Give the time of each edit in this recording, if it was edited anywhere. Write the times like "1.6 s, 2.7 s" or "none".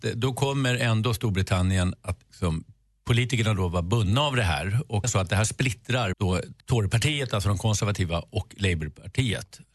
5.0 s, 6.1 s, 6.6 s

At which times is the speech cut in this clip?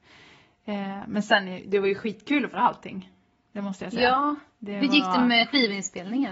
2.5 s

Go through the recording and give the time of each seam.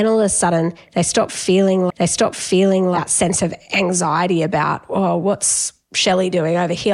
1.9 s

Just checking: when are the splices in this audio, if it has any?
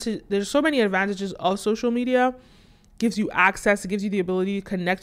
none

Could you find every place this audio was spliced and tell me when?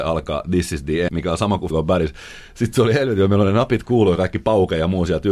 1.1 s, 1.7 s, 3.8 s

